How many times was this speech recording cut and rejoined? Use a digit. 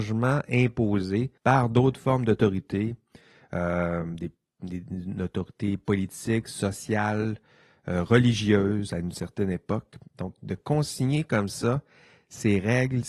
1